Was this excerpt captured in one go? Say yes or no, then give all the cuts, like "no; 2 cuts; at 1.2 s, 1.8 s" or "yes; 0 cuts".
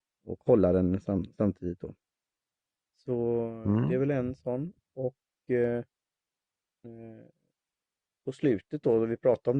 no; 1 cut; at 6.8 s